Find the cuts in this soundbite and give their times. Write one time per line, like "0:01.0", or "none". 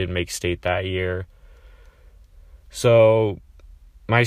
0:02.6